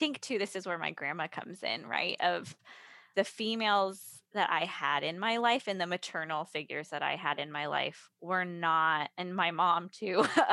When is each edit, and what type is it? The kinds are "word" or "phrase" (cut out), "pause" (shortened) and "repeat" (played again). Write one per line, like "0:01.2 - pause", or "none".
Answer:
0:03.1 - word
0:04.2 - pause
0:08.1 - pause